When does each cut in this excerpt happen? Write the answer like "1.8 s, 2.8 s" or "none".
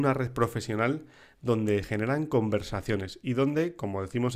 1.8 s